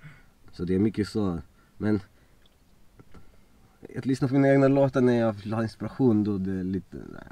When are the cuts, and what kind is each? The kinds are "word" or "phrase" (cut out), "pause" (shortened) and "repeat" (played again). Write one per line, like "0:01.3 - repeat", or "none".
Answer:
none

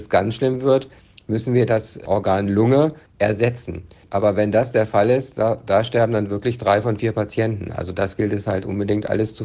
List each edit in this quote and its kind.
none

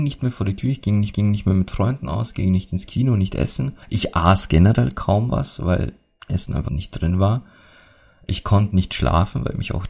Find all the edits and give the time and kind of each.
0:01.1 - repeat
0:03.8 - pause
0:06.7 - word

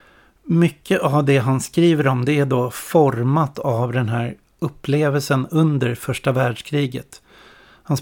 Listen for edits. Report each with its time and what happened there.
none

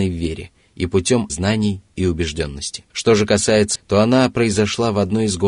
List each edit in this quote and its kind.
0:01.3 - word
0:02.9 - pause
0:03.8 - phrase

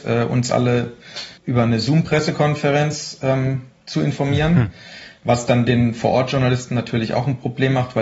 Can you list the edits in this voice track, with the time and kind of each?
0:01.4 - pause

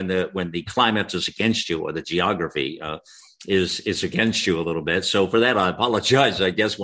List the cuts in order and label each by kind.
none

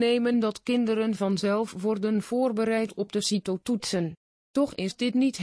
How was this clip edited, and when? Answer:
none

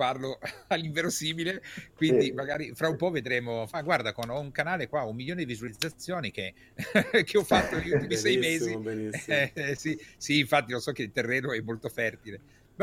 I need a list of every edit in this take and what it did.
none

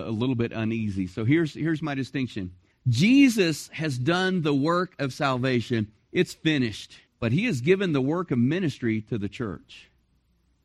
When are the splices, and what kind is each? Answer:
0:02.7 - pause
0:07.1 - pause

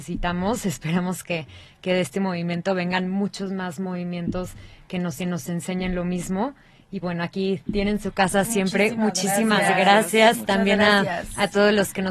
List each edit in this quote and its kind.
0:05.2 - repeat
0:07.0 - word

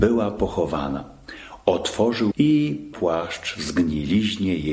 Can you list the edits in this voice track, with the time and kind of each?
0:02.3 - word
0:02.9 - word

